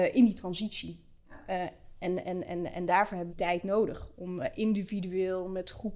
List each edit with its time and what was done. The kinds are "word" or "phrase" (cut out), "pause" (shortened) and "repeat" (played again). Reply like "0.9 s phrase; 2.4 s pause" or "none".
3.3 s word